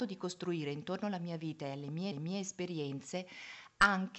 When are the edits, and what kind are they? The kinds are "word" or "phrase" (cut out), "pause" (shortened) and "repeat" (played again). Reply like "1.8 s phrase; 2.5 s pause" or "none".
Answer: 2.1 s repeat